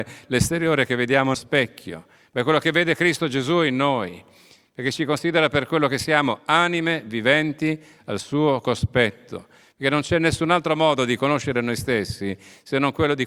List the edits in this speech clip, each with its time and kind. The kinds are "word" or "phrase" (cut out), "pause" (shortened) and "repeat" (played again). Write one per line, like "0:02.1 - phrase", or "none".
0:01.3 - word

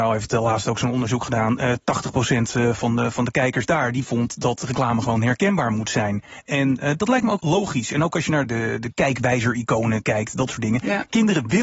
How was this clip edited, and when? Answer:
0:07.4 - word
0:08.4 - word

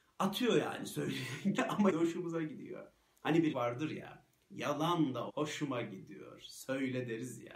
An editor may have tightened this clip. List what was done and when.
0:01.6 - word
0:01.9 - word
0:03.5 - word
0:05.3 - word

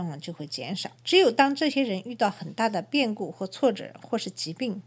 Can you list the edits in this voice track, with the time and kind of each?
0:00.9 - pause

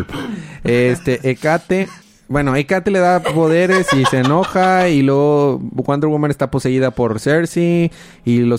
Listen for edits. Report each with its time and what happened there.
0:02.0 - pause

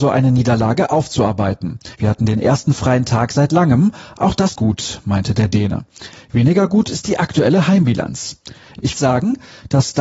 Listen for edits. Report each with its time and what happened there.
0:01.9 - pause
0:04.6 - word
0:08.9 - phrase

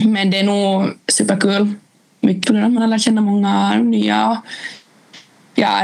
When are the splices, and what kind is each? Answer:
0:02.4 - word

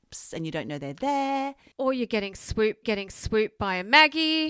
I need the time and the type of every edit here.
0:02.8 - repeat

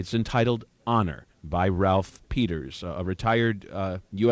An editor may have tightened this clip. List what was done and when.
0:01.3 - pause

